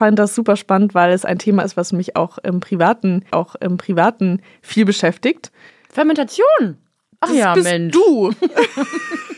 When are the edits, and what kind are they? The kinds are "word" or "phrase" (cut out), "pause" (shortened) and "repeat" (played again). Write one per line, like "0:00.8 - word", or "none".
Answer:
0:03.3 - repeat